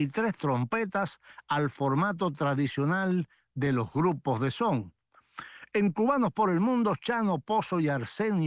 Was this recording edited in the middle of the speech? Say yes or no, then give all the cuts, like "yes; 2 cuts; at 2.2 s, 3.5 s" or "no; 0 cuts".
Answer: no; 0 cuts